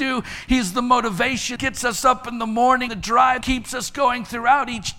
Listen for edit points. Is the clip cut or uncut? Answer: cut